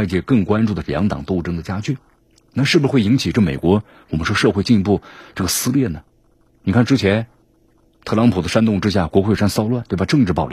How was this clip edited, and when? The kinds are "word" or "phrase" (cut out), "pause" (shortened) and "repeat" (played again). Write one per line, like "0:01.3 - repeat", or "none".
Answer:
none